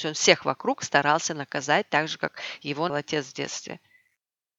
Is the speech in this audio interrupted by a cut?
yes; 1 cut; at 2.9 s

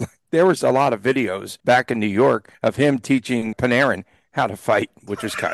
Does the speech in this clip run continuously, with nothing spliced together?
no; 3 cuts; at 1.6 s, 2.5 s, 3.5 s

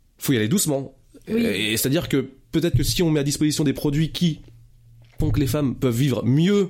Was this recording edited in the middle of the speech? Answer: no; 0 cuts

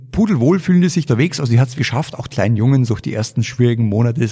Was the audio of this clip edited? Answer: yes; 4 cuts; at 1.1 s, 1.7 s, 2.3 s, 2.9 s

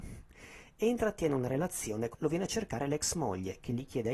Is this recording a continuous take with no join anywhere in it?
no; 1 cut; at 2.1 s

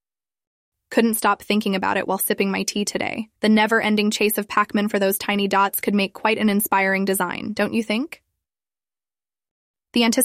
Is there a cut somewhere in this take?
yes; 1 cut; at 3.4 s

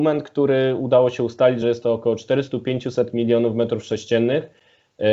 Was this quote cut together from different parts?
no; 0 cuts

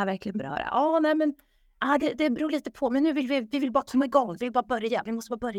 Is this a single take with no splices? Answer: yes; 0 cuts

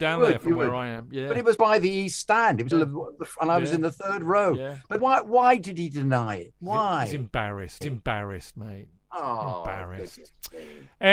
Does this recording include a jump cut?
yes; 4 cuts; at 1.6 s, 2.7 s, 5.0 s, 7.8 s

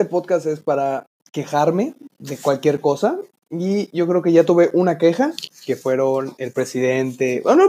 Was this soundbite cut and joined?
no; 0 cuts

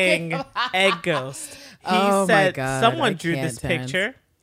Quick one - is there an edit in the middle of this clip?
no; 0 cuts

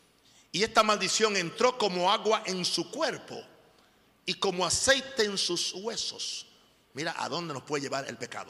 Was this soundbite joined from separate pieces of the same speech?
no; 0 cuts

